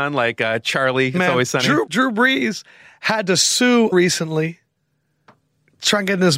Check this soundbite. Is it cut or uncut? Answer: cut